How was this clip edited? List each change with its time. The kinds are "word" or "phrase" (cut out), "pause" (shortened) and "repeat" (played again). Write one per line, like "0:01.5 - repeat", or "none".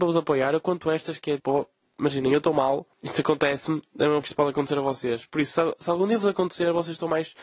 0:01.4 - word
0:02.9 - pause
0:04.2 - word